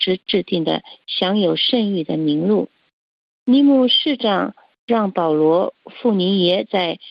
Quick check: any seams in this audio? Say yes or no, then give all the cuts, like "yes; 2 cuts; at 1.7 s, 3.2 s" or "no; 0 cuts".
no; 0 cuts